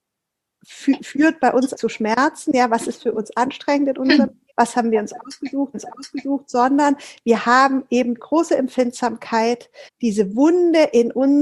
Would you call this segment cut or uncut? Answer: cut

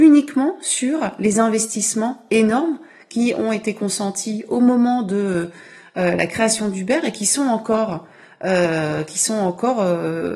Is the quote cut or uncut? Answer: uncut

